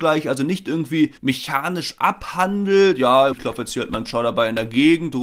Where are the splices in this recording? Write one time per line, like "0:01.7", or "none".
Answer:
0:01.2
0:03.3
0:04.1